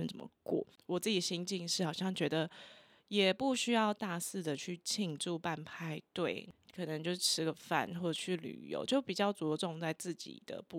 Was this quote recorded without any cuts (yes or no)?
yes